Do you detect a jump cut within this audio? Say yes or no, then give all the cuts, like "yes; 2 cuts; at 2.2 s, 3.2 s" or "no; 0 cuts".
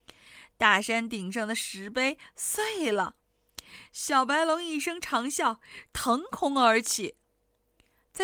yes; 1 cut; at 5.9 s